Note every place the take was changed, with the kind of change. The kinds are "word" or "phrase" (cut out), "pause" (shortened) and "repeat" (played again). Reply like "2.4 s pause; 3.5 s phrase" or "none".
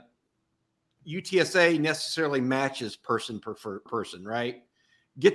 3.9 s word